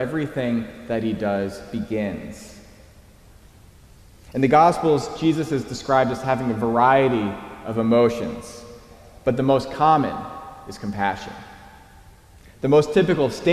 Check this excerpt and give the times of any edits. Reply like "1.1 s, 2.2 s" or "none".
none